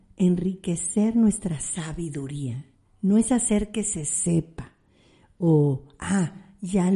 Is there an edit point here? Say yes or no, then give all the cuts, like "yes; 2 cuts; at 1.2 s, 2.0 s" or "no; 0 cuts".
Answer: no; 0 cuts